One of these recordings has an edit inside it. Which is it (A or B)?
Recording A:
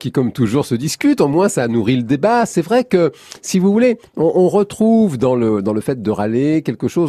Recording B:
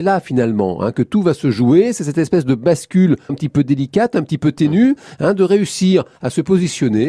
B